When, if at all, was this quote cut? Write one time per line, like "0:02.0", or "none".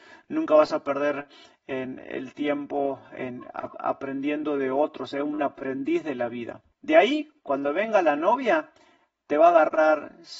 none